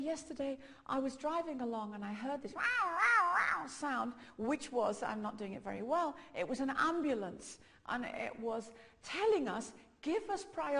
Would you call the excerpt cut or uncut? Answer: uncut